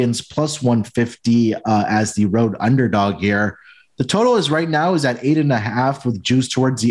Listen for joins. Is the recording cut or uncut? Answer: uncut